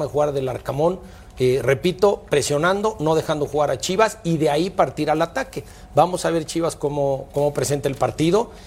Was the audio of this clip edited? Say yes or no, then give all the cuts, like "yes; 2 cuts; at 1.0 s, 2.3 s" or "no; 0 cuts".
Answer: no; 0 cuts